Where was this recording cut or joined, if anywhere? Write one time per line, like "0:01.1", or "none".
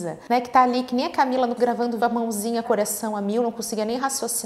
0:01.6
0:02.0
0:02.6